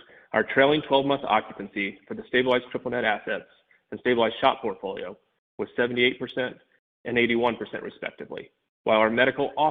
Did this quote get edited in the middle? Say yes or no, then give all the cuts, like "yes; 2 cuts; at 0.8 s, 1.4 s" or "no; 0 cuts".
no; 0 cuts